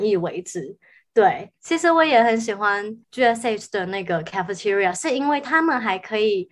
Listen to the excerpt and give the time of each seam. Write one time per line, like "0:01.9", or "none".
0:01.6
0:03.0